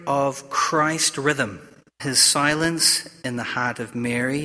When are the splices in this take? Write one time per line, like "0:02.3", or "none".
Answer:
0:02.0